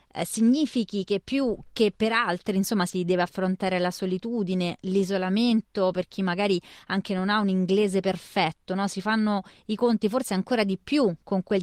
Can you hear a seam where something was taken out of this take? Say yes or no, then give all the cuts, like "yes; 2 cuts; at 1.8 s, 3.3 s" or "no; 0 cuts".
no; 0 cuts